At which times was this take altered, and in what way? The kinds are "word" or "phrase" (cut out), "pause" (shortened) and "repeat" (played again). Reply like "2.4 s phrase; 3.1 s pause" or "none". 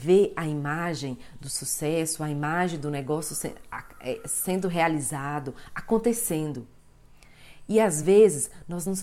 none